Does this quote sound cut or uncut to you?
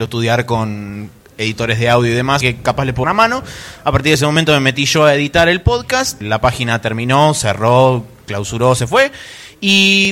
cut